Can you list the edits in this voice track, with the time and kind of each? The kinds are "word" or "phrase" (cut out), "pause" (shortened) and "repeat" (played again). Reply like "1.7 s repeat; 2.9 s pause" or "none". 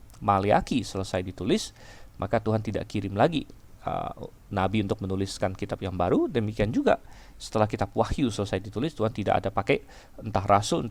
none